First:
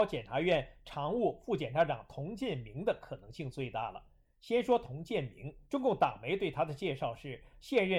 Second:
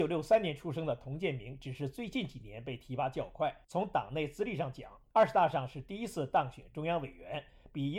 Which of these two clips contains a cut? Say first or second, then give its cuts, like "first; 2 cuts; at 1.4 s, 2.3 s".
first; 1 cut; at 5.7 s